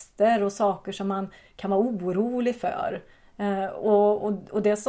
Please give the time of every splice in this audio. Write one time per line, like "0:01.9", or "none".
none